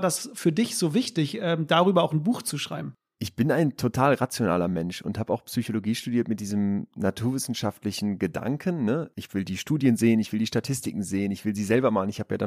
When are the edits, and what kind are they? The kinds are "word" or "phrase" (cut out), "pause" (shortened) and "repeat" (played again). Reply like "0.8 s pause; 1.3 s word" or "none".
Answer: none